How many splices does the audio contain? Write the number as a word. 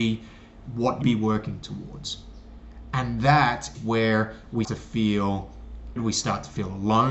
four